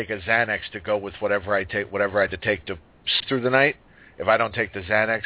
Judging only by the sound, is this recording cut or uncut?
cut